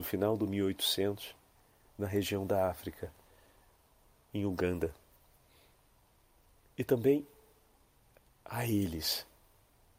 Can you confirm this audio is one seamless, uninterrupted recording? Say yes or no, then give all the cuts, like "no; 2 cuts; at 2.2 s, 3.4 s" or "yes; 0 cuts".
yes; 0 cuts